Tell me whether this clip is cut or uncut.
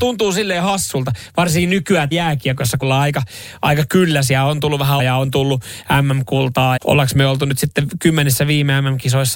cut